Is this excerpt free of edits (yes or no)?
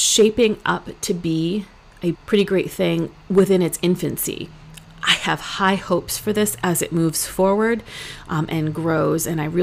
no